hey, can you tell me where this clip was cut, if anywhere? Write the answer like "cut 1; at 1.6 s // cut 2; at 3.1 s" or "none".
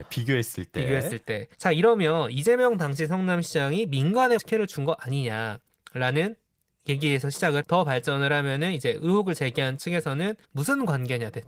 cut 1; at 1.5 s // cut 2; at 4.4 s // cut 3; at 7.6 s // cut 4; at 10.4 s